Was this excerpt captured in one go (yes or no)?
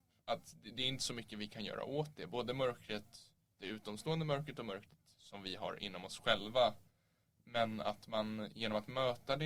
yes